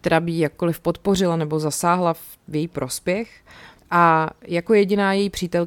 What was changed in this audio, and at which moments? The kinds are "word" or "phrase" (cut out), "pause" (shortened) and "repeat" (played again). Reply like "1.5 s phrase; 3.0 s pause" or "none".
3.8 s pause